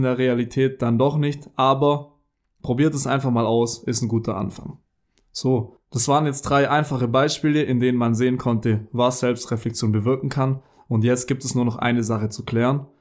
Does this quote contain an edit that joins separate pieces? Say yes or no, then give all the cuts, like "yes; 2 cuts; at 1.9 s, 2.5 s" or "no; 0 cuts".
no; 0 cuts